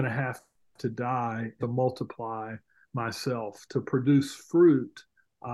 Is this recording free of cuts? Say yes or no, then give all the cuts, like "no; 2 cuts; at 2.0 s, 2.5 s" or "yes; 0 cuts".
no; 1 cut; at 1.6 s